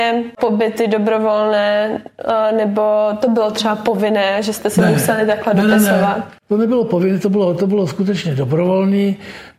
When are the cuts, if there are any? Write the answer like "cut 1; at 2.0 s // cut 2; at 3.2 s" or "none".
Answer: none